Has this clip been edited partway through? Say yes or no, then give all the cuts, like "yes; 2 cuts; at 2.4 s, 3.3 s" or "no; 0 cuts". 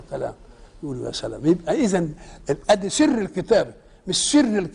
no; 0 cuts